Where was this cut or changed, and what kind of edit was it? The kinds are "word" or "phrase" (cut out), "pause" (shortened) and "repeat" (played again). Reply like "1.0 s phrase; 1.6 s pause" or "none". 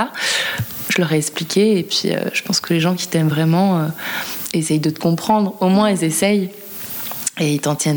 none